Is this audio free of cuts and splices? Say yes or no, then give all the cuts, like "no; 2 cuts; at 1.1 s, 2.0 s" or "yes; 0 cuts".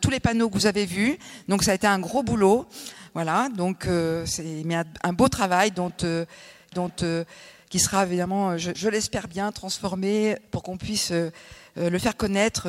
no; 3 cuts; at 6.7 s, 8.7 s, 10.5 s